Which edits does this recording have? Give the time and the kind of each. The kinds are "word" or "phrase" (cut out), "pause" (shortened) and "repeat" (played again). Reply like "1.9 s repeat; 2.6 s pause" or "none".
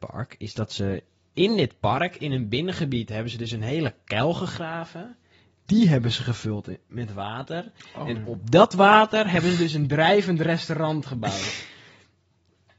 none